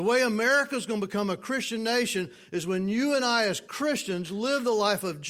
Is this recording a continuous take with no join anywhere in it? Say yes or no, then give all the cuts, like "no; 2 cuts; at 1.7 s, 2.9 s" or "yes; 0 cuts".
yes; 0 cuts